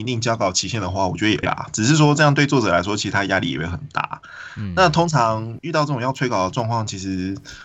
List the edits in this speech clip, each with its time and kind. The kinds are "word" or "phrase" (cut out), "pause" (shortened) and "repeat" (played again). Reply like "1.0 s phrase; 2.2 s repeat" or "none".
1.4 s word